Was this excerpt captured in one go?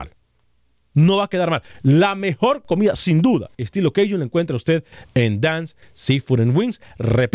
no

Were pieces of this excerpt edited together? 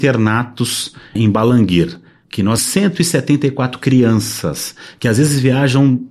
yes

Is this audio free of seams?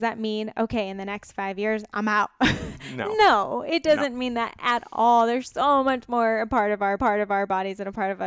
no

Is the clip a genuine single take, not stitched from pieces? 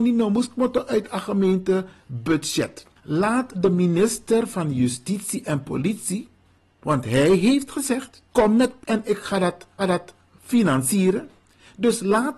no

